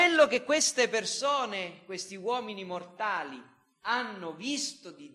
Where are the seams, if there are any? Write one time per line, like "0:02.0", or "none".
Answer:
none